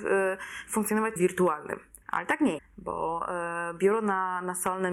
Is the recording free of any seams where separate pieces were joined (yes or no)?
no